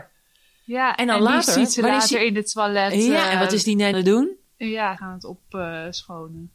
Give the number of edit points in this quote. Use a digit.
2